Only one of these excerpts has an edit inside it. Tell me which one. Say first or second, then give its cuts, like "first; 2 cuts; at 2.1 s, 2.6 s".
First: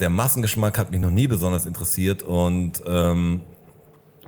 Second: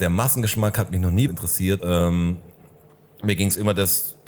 second; 2 cuts; at 1.3 s, 1.8 s